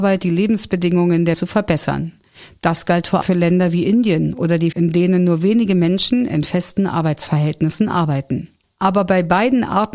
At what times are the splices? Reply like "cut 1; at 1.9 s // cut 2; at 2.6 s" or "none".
cut 1; at 1.3 s // cut 2; at 3.2 s // cut 3; at 4.7 s